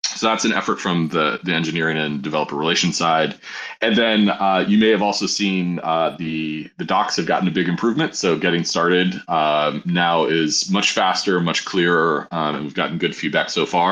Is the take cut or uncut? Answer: uncut